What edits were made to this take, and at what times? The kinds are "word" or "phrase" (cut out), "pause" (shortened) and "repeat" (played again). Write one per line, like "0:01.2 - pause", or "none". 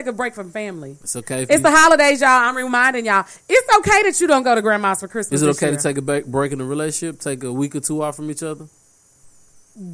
none